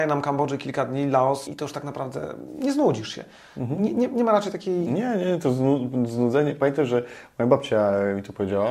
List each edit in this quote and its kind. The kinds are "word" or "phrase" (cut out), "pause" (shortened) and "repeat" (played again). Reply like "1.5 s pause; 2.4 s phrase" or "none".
1.5 s word